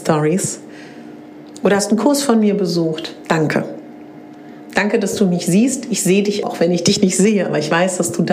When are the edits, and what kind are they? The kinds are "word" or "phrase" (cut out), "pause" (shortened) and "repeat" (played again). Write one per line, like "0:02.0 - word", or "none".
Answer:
0:06.4 - word